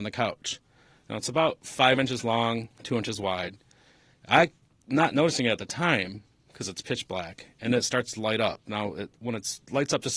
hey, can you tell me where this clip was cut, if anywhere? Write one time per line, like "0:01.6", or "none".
none